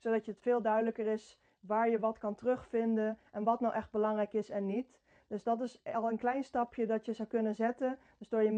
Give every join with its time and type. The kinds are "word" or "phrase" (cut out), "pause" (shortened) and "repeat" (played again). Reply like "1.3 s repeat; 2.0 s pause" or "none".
none

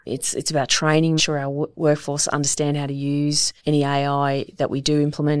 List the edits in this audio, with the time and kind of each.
1.2 s word; 3.6 s pause

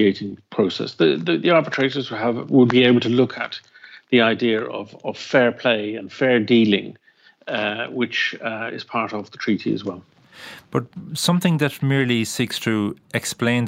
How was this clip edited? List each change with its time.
none

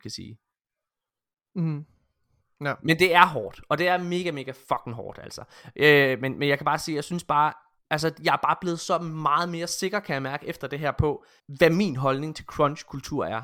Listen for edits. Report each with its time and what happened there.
7.8 s pause; 11.4 s pause

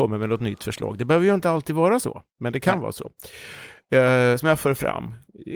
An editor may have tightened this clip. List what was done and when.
2.3 s pause

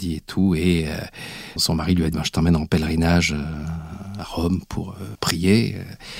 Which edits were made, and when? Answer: 1.6 s word; 2.1 s word; 5.1 s word

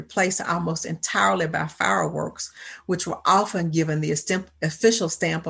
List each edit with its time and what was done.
none

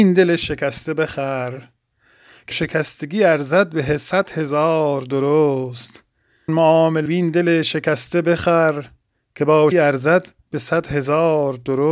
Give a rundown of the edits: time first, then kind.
2.5 s word; 6.5 s word; 7.1 s word; 9.7 s word

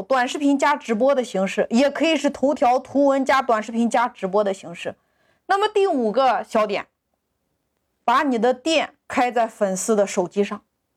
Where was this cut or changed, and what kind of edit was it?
none

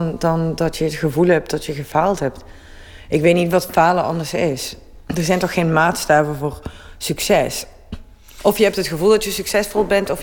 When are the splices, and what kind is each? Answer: none

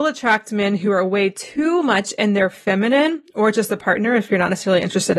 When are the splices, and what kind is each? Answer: none

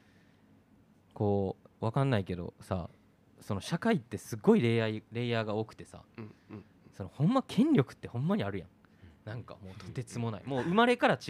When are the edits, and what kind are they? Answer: none

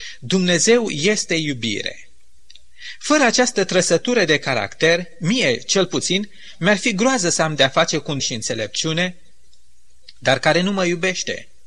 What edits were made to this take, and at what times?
8.2 s phrase

